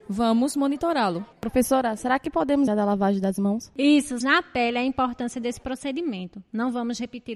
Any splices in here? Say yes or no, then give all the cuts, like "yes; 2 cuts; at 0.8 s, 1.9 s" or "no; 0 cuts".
yes; 3 cuts; at 1.3 s, 2.7 s, 4.2 s